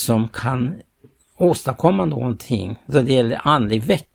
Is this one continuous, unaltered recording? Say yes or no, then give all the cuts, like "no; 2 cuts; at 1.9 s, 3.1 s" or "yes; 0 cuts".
yes; 0 cuts